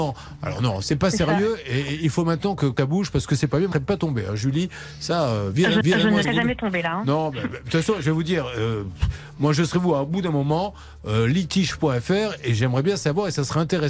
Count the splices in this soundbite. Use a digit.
4